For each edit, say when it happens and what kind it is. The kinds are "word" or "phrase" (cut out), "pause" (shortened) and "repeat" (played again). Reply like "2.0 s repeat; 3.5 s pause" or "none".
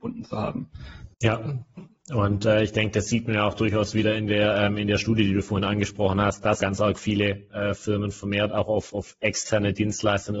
1.1 s pause; 6.6 s word